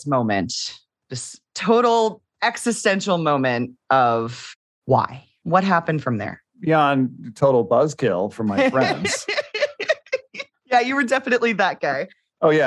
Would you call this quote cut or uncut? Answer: uncut